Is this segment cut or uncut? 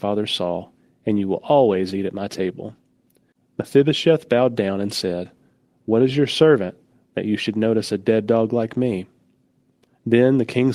uncut